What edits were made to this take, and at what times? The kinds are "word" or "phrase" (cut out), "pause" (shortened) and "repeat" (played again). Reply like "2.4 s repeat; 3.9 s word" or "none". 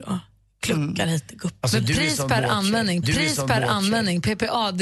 3.0 s repeat